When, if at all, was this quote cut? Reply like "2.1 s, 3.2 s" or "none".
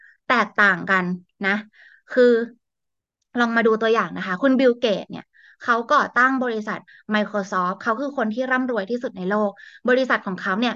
none